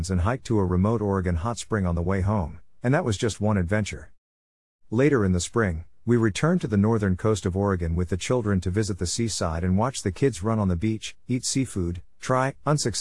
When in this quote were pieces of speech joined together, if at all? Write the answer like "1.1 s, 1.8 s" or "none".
none